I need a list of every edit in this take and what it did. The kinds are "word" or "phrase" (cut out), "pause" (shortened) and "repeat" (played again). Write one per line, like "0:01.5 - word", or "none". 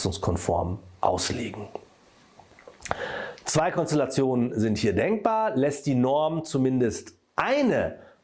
none